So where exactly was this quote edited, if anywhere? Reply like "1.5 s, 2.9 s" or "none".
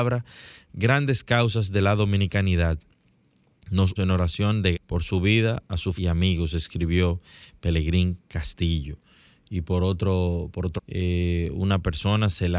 4.0 s, 4.7 s, 6.0 s, 10.8 s